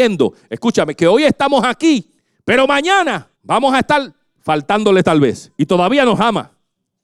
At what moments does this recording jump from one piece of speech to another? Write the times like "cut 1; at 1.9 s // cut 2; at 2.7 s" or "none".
cut 1; at 2.2 s // cut 2; at 3.3 s // cut 3; at 5.5 s